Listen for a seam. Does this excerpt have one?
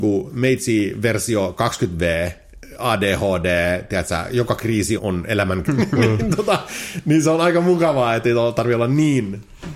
yes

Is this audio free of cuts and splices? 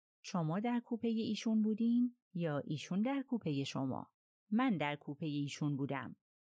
yes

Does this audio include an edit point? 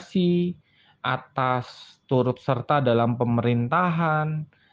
no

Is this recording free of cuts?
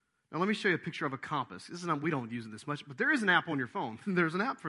yes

